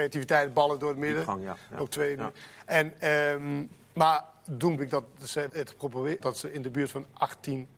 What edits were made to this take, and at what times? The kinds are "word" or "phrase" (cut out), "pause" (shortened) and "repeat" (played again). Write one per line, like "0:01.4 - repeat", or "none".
0:03.8 - pause
0:04.8 - word
0:05.5 - word
0:06.2 - phrase